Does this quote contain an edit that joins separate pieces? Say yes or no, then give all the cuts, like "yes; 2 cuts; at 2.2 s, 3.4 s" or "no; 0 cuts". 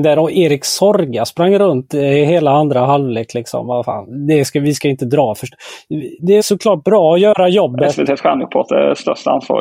yes; 1 cut; at 6.4 s